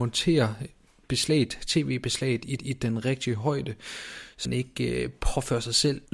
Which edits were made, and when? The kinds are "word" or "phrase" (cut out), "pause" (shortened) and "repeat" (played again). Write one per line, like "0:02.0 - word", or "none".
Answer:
0:02.6 - repeat
0:04.5 - word